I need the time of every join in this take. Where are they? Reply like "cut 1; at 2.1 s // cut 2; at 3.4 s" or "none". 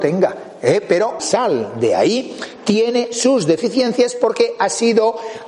cut 1; at 1.2 s